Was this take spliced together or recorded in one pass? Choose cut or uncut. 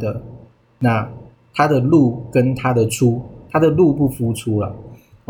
cut